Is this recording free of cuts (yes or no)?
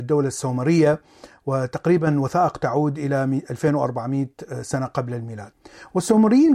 yes